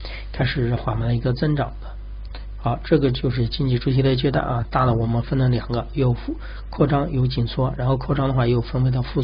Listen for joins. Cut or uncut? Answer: uncut